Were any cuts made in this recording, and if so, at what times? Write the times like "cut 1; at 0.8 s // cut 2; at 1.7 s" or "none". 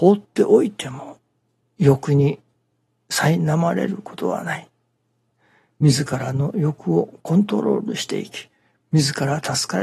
none